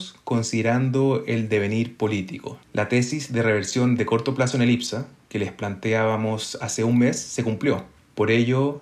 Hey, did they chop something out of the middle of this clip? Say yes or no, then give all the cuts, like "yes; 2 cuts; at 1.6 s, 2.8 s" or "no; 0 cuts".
yes; 1 cut; at 2.6 s